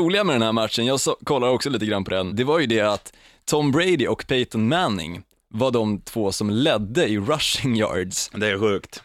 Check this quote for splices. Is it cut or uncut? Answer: cut